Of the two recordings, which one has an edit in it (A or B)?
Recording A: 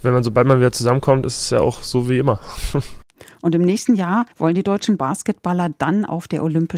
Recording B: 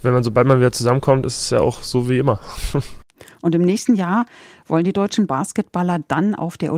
A